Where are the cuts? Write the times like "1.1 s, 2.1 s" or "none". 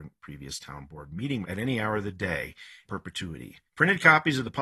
1.4 s, 2.8 s, 3.7 s

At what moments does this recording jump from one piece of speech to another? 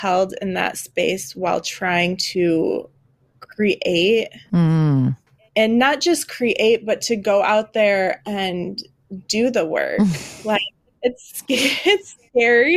none

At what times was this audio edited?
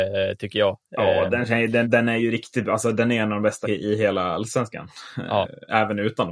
1.8 s, 3.6 s

